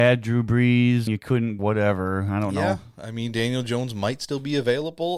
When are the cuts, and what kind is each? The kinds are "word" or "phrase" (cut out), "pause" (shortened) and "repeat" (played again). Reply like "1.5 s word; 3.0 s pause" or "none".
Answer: 1.1 s word; 1.6 s phrase